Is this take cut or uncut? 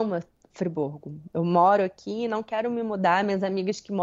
uncut